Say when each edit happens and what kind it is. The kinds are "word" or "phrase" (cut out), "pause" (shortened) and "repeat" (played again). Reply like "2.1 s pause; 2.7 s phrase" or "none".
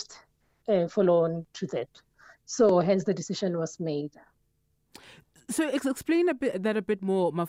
none